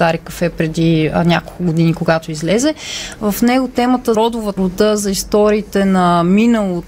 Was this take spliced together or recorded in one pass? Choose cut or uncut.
cut